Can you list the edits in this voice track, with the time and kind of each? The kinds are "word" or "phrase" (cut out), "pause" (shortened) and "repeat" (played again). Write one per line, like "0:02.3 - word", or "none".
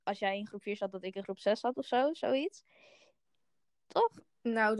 none